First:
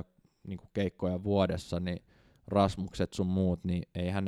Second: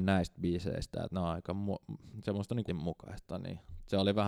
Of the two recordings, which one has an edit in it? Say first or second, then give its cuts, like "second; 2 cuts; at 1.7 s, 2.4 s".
second; 1 cut; at 2.7 s